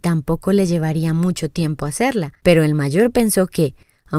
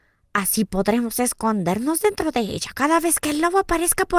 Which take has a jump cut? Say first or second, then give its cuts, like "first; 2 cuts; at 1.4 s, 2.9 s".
first; 1 cut; at 2.4 s